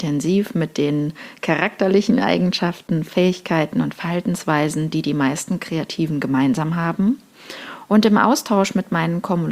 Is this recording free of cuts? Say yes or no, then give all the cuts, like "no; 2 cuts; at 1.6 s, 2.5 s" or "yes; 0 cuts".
yes; 0 cuts